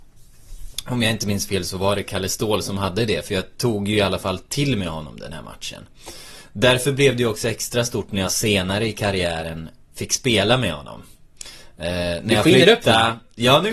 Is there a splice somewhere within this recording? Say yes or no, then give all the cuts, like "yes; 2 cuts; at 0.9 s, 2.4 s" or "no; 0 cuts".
no; 0 cuts